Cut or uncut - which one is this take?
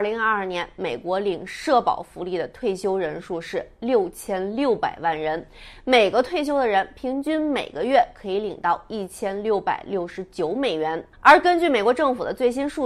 cut